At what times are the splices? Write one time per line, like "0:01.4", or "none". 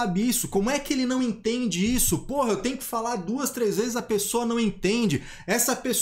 none